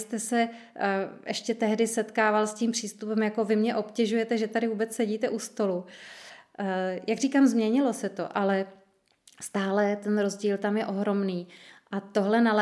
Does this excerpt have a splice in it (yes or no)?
no